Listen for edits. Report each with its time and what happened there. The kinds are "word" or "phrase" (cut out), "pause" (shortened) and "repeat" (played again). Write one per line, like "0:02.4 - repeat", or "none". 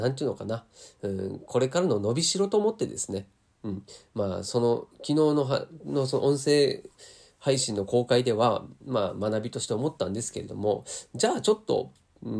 none